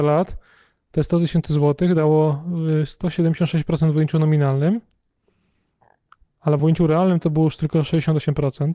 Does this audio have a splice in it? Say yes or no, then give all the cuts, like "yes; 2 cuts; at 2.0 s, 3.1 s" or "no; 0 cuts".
no; 0 cuts